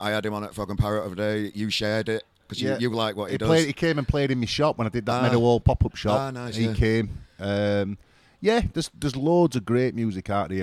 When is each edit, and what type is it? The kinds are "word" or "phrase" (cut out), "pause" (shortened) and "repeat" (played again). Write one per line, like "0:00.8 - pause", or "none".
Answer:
none